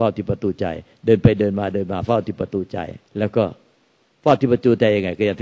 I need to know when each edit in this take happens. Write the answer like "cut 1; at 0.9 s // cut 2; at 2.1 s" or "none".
cut 1; at 3.0 s